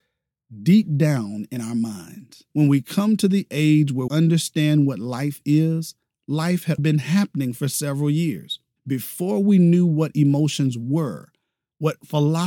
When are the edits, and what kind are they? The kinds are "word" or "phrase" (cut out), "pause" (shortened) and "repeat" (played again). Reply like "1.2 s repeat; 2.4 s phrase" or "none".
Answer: 2.5 s pause; 4.1 s word; 6.8 s word; 8.8 s pause